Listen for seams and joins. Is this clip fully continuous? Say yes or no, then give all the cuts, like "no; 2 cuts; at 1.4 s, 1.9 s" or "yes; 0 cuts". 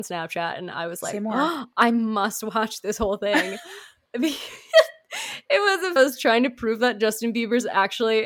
no; 1 cut; at 6.0 s